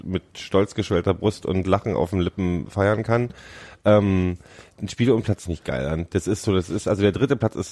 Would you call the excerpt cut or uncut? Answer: cut